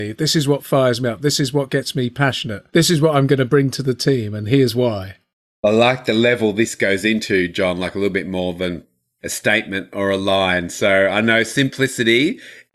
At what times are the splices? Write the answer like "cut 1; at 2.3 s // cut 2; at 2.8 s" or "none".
cut 1; at 2.7 s